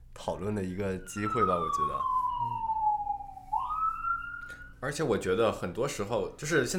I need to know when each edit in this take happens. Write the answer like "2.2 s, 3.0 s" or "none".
4.7 s